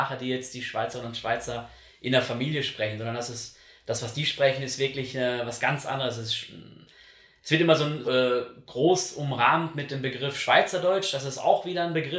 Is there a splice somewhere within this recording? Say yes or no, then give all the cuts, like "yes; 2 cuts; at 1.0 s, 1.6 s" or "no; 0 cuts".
yes; 1 cut; at 8.0 s